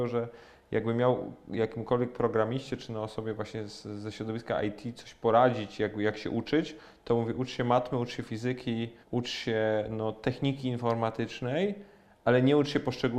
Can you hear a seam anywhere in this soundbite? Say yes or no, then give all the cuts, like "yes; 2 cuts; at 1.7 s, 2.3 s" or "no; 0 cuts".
yes; 1 cut; at 9.0 s